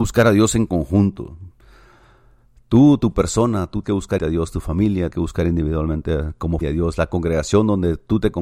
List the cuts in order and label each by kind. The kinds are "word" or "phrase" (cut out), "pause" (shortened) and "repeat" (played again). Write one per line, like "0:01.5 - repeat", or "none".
0:03.8 - word
0:04.2 - word
0:05.1 - word
0:06.6 - word